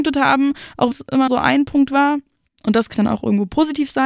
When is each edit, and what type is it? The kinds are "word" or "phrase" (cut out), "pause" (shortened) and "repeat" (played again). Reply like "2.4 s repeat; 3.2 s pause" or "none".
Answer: 0.9 s word; 1.3 s word; 2.5 s pause; 2.9 s word